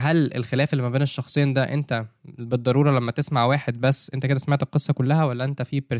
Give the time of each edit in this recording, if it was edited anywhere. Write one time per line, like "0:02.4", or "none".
none